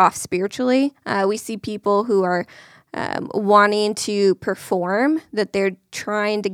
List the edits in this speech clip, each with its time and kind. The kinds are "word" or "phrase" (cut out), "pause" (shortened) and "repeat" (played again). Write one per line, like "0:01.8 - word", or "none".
none